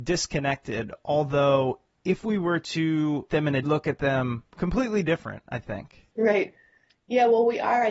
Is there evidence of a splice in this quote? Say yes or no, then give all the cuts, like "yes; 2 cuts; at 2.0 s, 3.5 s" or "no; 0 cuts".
yes; 4 cuts; at 3.3 s, 3.6 s, 4.5 s, 6.1 s